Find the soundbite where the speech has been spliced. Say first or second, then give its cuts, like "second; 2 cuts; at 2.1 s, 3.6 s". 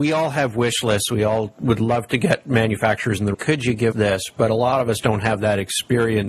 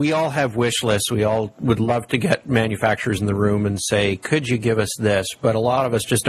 first; 3 cuts; at 3.3 s, 3.9 s, 5.0 s